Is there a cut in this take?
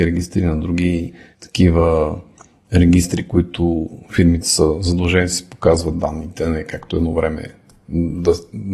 no; 0 cuts

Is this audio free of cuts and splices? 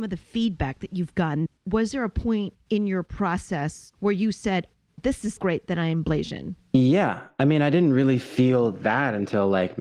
no; 2 cuts; at 1.6 s, 5.4 s

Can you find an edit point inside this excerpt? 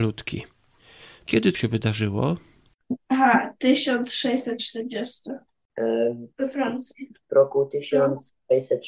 yes; 3 cuts; at 1.5 s, 6.3 s, 7.2 s

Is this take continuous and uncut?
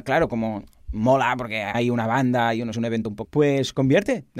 no; 3 cuts; at 1.7 s, 2.7 s, 3.2 s

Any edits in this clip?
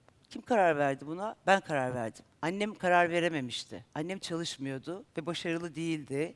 yes; 3 cuts; at 2.3 s, 3.9 s, 5.1 s

